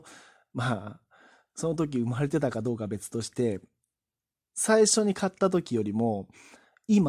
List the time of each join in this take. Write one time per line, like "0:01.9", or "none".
none